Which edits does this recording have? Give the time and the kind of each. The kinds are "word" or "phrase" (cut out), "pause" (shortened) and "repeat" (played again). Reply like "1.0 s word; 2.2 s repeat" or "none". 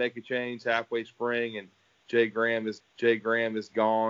1.0 s word; 2.8 s repeat